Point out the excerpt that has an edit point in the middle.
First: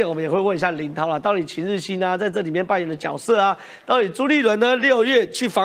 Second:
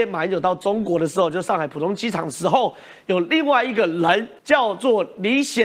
second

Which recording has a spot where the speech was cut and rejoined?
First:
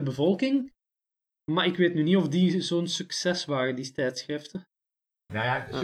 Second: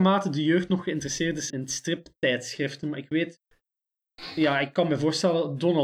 second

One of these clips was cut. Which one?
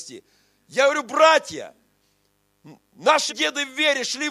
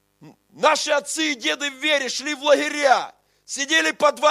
first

